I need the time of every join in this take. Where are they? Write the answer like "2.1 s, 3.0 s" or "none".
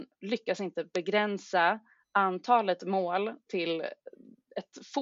3.5 s